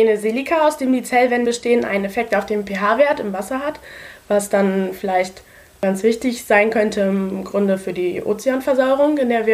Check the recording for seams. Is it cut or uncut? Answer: cut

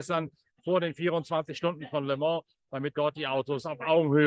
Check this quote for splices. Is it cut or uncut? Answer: uncut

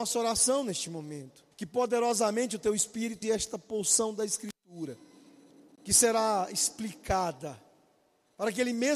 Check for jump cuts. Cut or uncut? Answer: cut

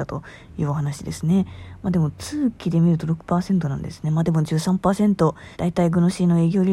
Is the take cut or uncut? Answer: cut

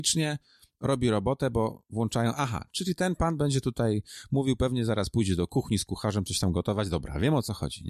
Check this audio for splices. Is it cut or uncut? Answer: uncut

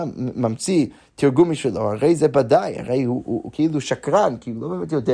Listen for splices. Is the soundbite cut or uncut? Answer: uncut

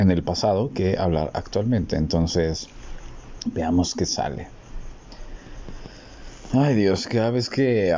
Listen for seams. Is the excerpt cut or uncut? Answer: uncut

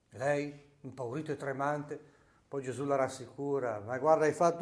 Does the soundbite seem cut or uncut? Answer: uncut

